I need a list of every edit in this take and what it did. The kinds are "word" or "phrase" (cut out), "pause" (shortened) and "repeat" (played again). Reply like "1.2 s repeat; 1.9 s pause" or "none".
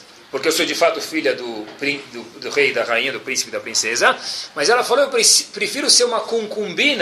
none

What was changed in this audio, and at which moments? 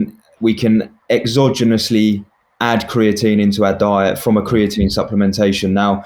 none

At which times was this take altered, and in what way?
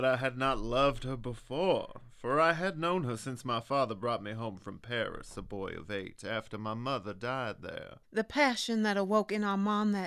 8.0 s pause

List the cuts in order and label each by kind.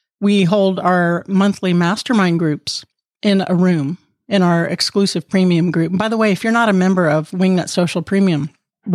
none

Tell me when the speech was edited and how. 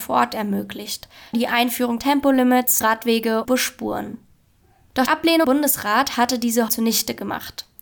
1.3 s word; 2.0 s word; 2.8 s word; 3.4 s word; 5.1 s word; 5.4 s word; 6.7 s word

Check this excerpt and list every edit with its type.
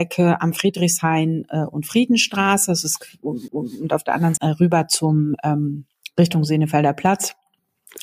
3.5 s repeat; 4.4 s word

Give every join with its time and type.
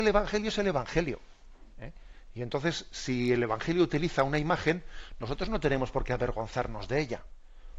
none

